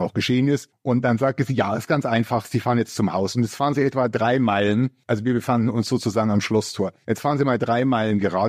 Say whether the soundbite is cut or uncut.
uncut